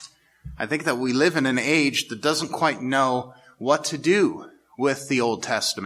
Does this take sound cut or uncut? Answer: uncut